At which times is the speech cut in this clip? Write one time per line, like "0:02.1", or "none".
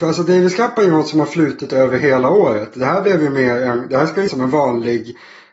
0:04.3